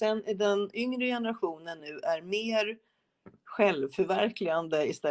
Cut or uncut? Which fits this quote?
uncut